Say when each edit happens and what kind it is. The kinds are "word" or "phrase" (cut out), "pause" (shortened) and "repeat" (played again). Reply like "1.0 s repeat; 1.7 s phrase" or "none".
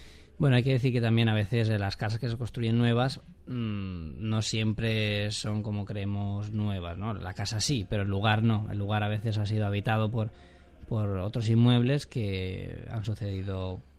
3.4 s pause

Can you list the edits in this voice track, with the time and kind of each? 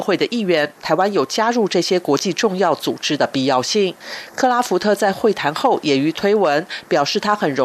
6.1 s word

